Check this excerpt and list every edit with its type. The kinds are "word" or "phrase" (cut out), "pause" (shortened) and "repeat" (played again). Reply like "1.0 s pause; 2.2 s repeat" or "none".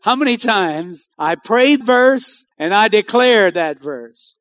1.1 s pause; 1.8 s word; 2.5 s pause